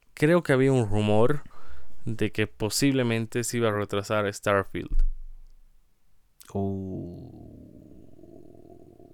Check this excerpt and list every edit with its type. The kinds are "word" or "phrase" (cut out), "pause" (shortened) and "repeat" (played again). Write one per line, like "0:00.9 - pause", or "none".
none

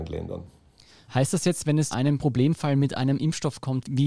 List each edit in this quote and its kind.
0:01.9 - word

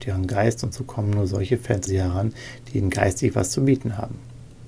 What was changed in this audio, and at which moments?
0:01.9 - word

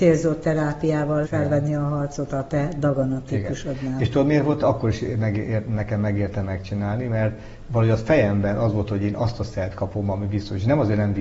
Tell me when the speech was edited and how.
0:01.2 - word

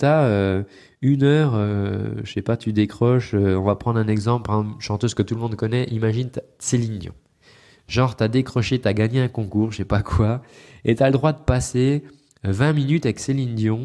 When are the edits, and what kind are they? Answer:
none

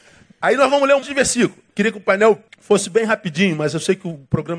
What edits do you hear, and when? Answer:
0:01.0 - word
0:01.7 - pause
0:02.5 - pause

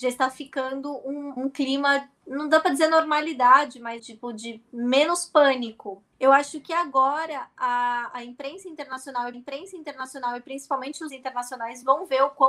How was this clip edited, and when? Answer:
0:01.4 - word
0:02.2 - pause
0:04.0 - word
0:06.1 - pause
0:09.3 - repeat
0:11.1 - word

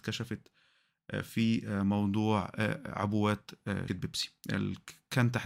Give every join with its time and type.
0:03.9 - word

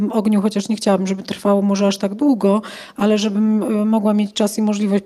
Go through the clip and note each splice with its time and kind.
none

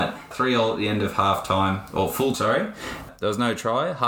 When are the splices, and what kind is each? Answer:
0:02.3 - word

